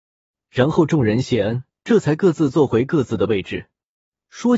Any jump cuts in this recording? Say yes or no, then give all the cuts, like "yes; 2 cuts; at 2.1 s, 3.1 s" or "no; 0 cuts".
yes; 1 cut; at 1.7 s